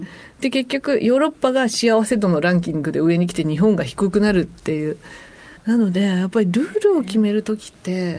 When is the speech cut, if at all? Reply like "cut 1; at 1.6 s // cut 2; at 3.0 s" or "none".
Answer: cut 1; at 5.6 s

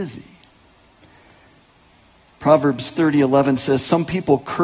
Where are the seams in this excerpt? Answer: none

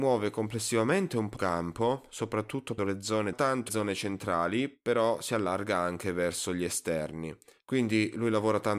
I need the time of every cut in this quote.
cut 1; at 1.4 s // cut 2; at 2.8 s // cut 3; at 3.3 s // cut 4; at 3.7 s

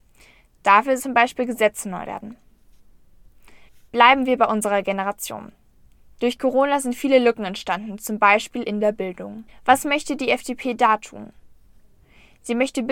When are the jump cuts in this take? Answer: cut 1; at 1.0 s // cut 2; at 2.0 s // cut 3; at 3.7 s // cut 4; at 9.5 s

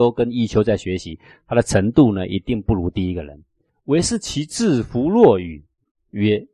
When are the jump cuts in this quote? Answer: none

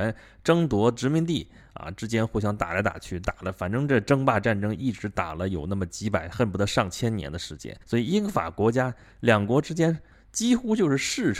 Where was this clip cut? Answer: cut 1; at 7.8 s

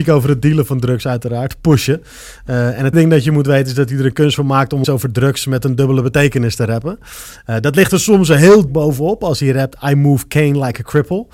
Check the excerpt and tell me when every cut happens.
cut 1; at 2.9 s // cut 2; at 4.8 s // cut 3; at 8.7 s

